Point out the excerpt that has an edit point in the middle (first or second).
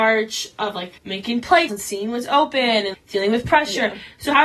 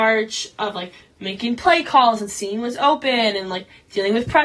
first